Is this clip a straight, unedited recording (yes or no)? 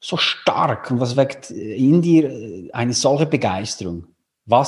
yes